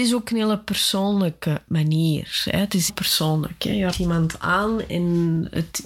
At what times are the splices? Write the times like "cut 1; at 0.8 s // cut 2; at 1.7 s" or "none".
cut 1; at 2.9 s // cut 2; at 3.9 s // cut 3; at 4.9 s